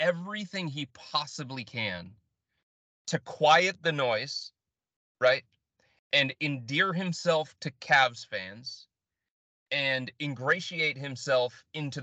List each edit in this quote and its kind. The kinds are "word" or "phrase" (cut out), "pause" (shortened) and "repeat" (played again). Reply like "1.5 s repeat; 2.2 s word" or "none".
none